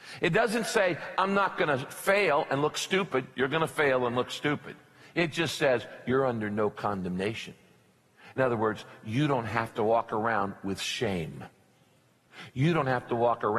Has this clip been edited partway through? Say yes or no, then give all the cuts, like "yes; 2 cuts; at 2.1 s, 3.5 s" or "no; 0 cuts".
no; 0 cuts